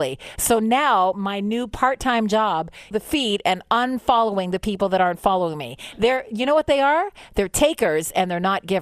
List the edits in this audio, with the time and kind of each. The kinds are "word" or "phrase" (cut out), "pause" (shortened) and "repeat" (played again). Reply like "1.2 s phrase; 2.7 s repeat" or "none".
2.9 s phrase